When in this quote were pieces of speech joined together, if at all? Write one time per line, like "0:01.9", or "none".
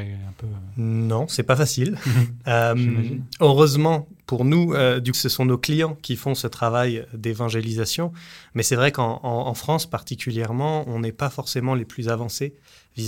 0:05.1